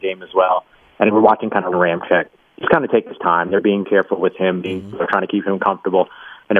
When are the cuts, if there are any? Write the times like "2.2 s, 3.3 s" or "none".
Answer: 1.7 s, 3.8 s